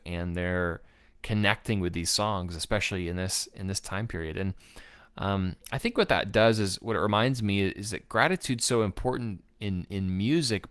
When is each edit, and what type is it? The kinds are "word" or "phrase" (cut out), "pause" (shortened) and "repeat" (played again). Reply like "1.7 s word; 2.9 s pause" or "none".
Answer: none